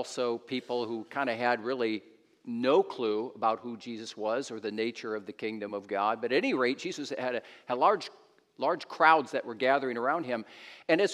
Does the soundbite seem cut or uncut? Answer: uncut